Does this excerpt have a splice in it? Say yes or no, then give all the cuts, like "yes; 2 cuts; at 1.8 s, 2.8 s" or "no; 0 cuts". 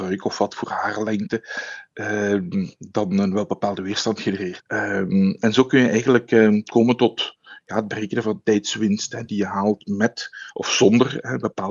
no; 0 cuts